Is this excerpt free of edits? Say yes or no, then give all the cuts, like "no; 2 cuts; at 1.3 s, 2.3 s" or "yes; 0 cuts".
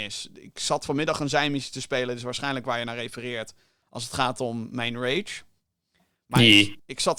yes; 0 cuts